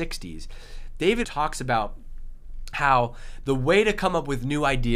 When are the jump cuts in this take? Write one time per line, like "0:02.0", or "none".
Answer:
0:01.2